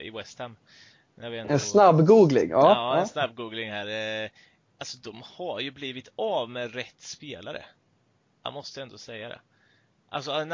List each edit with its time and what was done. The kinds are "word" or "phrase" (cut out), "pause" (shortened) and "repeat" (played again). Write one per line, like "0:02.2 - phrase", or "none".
none